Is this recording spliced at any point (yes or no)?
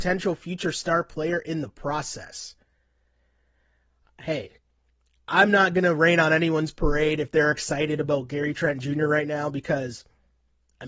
no